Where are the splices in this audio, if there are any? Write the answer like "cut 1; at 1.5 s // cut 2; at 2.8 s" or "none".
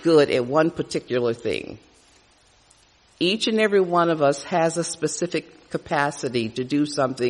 none